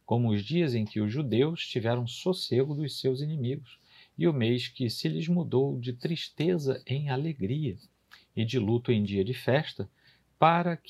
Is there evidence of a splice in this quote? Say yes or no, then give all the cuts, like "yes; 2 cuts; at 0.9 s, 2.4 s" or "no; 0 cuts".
no; 0 cuts